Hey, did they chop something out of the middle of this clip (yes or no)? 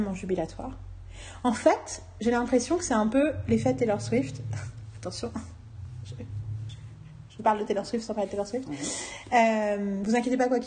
no